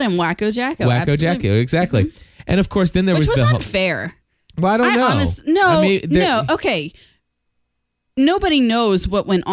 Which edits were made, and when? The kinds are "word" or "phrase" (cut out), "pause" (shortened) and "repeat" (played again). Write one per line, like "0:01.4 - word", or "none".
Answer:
none